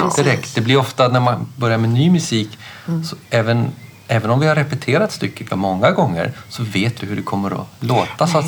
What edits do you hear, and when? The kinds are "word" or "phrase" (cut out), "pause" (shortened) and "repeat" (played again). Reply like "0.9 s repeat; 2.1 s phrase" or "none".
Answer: 3.2 s pause; 5.5 s word; 7.0 s word